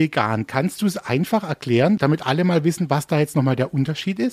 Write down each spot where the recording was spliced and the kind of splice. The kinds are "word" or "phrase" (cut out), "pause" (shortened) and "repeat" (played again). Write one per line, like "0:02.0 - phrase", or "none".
0:02.0 - word